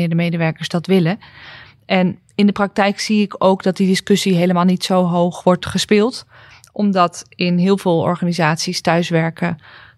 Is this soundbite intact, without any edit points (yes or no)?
yes